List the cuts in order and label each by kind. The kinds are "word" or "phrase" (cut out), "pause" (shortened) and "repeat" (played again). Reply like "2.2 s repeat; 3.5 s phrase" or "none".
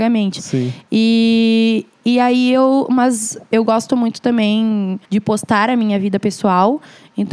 5.0 s pause